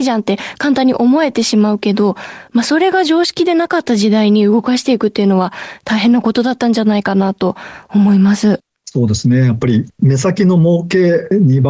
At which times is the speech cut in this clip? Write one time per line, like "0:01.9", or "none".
0:08.7
0:09.9